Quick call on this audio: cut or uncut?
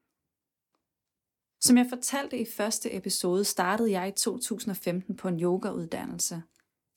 uncut